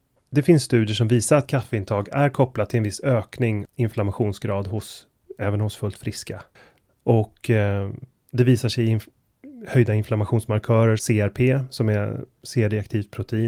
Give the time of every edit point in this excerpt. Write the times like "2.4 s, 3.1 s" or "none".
3.6 s, 6.5 s, 11.0 s